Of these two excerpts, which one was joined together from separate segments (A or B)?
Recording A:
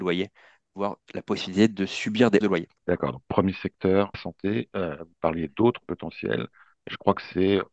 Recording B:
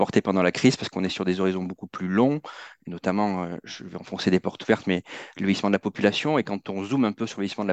A